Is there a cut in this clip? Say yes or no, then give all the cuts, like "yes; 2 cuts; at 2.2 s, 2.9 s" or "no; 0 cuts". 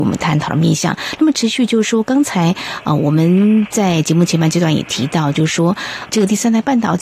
yes; 1 cut; at 6.1 s